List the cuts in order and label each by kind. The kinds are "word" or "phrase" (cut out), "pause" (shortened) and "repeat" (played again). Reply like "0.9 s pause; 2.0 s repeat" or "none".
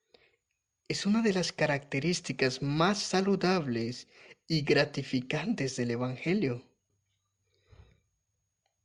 none